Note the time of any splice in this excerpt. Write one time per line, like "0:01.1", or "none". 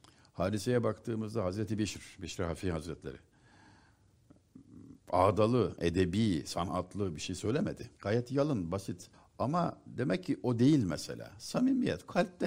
0:08.0
0:09.1